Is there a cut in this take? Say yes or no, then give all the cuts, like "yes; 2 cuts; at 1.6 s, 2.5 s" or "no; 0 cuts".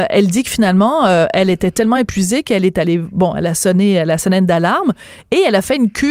no; 0 cuts